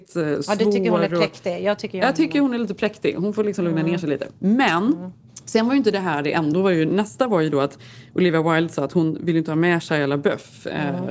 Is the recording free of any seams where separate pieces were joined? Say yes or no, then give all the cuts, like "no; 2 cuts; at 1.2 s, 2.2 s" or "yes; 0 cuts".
no; 1 cut; at 6.5 s